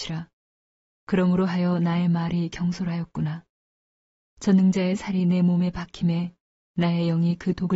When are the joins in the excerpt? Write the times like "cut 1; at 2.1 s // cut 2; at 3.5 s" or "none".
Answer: none